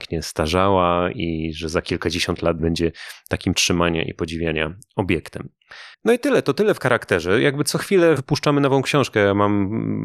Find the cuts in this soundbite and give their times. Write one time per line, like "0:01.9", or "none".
0:02.6
0:03.5
0:05.9
0:08.2